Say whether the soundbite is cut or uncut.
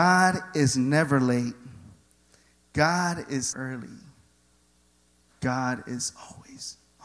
cut